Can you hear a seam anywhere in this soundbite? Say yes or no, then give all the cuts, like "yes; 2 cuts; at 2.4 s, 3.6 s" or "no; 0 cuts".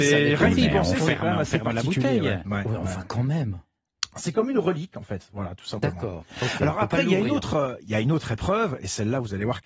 no; 0 cuts